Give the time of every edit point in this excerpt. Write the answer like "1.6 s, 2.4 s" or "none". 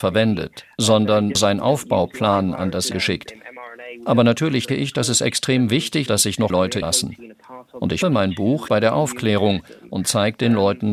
1.3 s, 2.9 s, 4.7 s, 6.1 s, 6.5 s, 6.8 s, 8.0 s, 8.7 s